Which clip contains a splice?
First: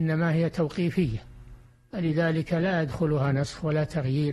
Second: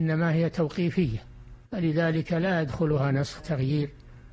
second; 2 cuts; at 1.7 s, 3.4 s

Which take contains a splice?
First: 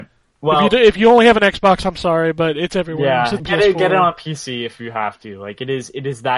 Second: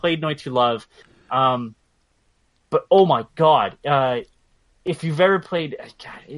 first; 1 cut; at 3.4 s

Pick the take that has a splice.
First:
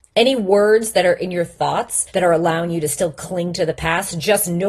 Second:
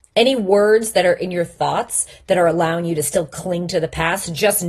first; 1 cut; at 2.1 s

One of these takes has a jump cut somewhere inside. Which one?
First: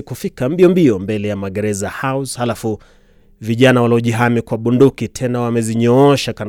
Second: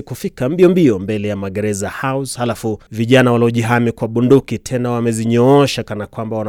second; 1 cut; at 2.9 s

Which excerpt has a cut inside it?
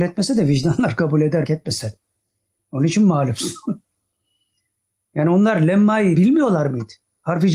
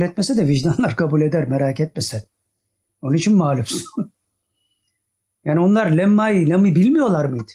first; 2 cuts; at 1.5 s, 6.1 s

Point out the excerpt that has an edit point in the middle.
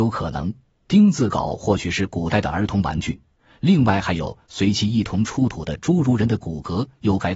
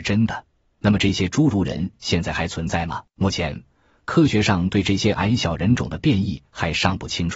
second; 1 cut; at 3.1 s

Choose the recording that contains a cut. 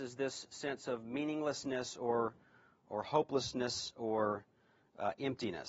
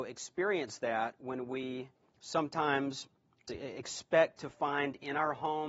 second; 2 cuts; at 1.9 s, 3.5 s

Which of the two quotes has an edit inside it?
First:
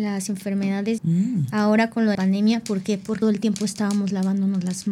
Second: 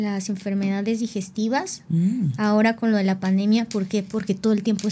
first; 3 cuts; at 1.0 s, 2.1 s, 3.2 s

